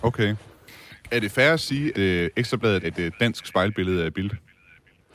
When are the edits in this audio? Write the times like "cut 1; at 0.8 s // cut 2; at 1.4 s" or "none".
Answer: cut 1; at 1.9 s // cut 2; at 2.8 s